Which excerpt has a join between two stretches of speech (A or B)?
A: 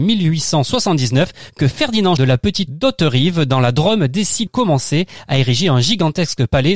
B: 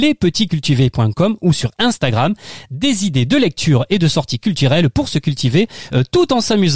A